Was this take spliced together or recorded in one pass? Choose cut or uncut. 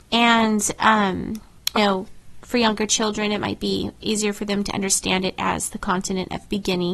cut